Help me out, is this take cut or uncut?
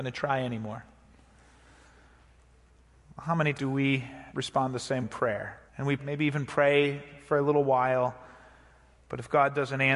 cut